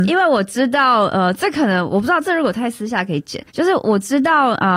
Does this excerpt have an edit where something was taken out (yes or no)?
yes